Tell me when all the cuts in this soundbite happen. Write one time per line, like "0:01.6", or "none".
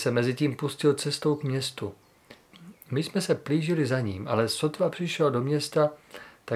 0:02.8

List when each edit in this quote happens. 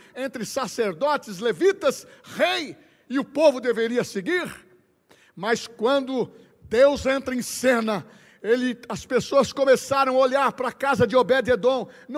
none

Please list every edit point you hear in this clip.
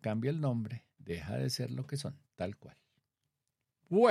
0:00.9
0:02.3

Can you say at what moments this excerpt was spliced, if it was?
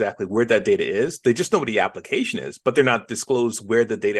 none

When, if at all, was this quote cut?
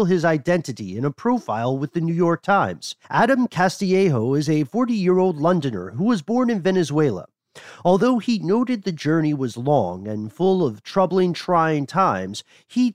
0:03.0

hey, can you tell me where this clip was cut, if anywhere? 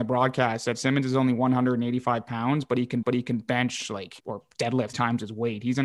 0:03.0
0:04.2
0:04.9

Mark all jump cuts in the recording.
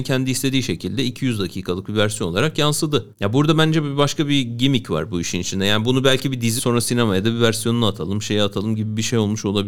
0:03.1
0:06.6

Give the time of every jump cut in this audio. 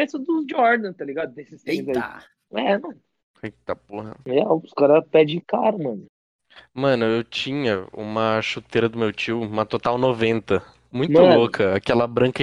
none

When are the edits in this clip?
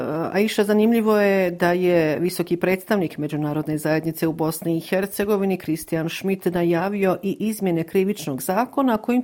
none

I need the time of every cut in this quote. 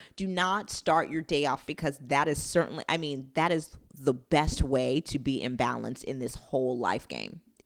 0:01.7

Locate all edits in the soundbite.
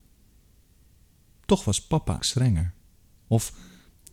0:02.2

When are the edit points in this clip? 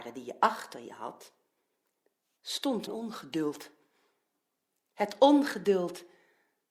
0:02.9

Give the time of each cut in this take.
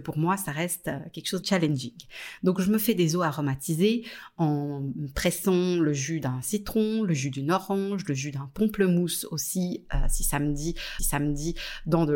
0:01.4
0:11.0

